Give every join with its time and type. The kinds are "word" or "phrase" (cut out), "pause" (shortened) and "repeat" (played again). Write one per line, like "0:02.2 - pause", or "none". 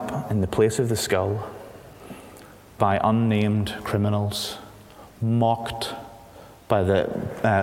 0:02.8 - word